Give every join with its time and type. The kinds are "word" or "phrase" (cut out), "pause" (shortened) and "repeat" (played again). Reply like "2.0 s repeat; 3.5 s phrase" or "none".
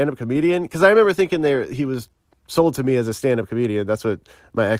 none